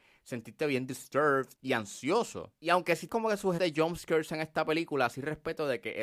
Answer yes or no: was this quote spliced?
yes